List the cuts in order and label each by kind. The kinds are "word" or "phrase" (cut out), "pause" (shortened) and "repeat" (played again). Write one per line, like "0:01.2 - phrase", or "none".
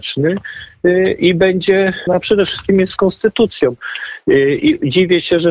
0:02.1 - phrase
0:02.9 - word